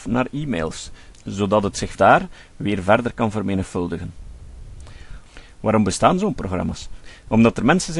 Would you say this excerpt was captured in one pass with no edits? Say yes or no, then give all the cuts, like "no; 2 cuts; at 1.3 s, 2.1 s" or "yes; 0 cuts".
no; 1 cut; at 1.9 s